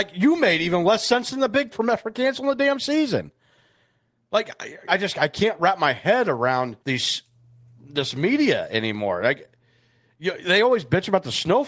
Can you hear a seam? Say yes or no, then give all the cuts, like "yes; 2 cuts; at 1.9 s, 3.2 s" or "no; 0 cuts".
yes; 3 cuts; at 1.7 s, 4.9 s, 6.8 s